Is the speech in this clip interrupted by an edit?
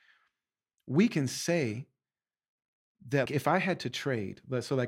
yes; 1 cut; at 3.3 s

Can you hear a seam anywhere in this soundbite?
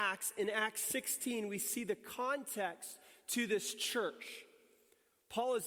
no; 0 cuts

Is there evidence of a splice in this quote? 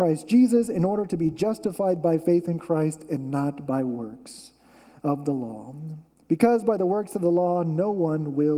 no; 0 cuts

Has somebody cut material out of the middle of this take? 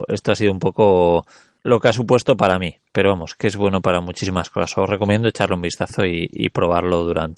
no; 0 cuts

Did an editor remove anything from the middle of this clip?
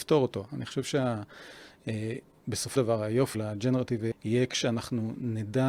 yes; 3 cuts; at 2.8 s, 3.3 s, 4.1 s

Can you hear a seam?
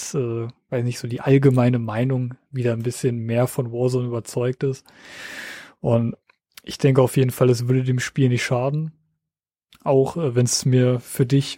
no; 0 cuts

